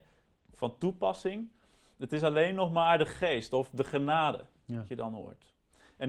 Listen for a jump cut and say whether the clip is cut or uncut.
uncut